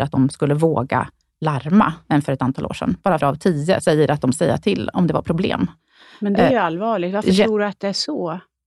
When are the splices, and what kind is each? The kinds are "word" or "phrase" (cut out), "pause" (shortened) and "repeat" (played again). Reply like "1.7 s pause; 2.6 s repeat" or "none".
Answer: 3.2 s word; 4.3 s word